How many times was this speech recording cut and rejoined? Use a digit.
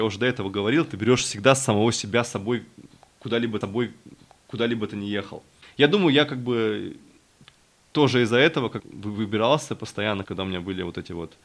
3